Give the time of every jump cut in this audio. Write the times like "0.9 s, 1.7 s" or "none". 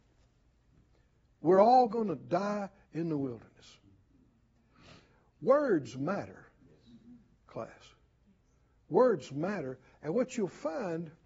none